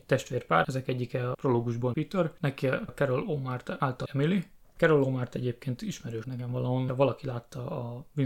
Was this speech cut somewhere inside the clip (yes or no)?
yes